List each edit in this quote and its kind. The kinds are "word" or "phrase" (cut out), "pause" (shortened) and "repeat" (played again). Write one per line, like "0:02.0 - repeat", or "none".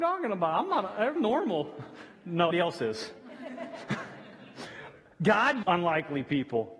0:01.2 - word
0:02.5 - word
0:05.6 - word